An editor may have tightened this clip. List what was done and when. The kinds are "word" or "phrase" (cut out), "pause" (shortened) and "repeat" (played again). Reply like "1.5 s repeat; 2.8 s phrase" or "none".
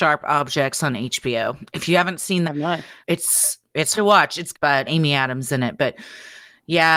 2.4 s word; 3.0 s pause; 3.9 s word; 4.5 s word; 4.9 s word; 5.4 s word